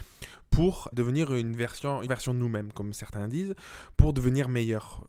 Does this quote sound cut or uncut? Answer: cut